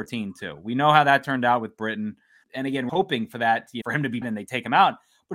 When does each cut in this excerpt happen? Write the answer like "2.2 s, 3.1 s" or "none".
2.4 s, 2.9 s, 3.8 s, 4.2 s